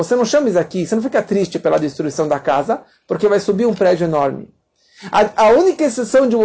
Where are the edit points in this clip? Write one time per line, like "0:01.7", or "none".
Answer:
none